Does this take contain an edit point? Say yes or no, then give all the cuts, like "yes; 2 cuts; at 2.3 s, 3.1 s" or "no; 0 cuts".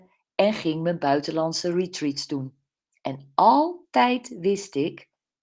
no; 0 cuts